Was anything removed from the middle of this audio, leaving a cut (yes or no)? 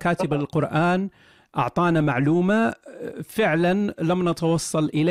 no